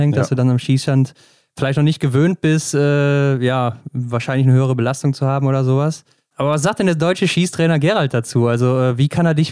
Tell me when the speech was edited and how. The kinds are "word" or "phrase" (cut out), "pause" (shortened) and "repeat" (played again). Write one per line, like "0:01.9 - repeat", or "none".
none

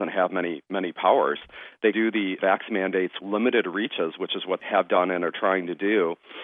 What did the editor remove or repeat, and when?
0:01.9 - word
0:02.4 - word
0:03.2 - word
0:04.6 - word

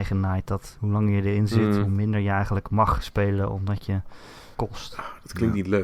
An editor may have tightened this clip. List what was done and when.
0:04.5 - phrase

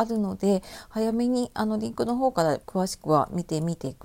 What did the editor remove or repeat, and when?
0:02.6 - pause

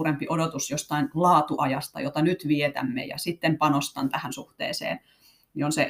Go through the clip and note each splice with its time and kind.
none

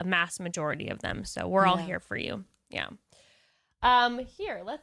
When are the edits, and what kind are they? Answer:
none

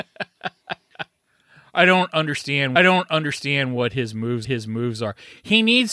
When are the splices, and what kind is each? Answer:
0:02.8 - repeat
0:04.4 - repeat

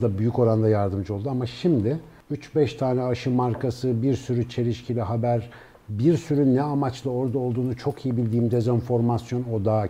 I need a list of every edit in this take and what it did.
none

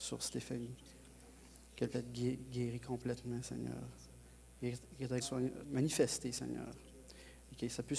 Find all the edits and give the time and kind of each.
0:01.9 - word
0:05.2 - word
0:05.6 - word

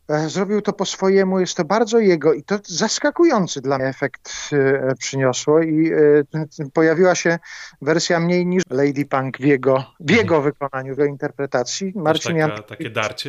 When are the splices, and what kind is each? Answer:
0:03.8 - word
0:08.6 - word
0:11.0 - word

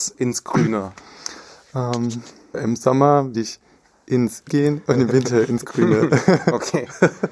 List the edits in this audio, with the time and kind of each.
0:02.5 - word
0:03.3 - word
0:04.5 - word

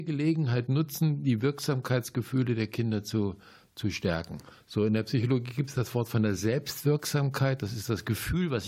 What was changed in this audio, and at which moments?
none

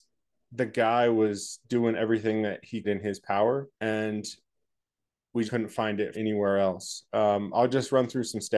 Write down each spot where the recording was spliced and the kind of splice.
0:02.8 - word
0:03.7 - pause
0:05.5 - word
0:06.1 - word

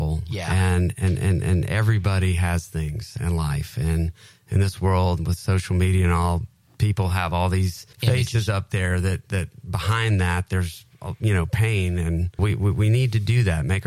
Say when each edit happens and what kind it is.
0:07.9 - pause
0:12.4 - word

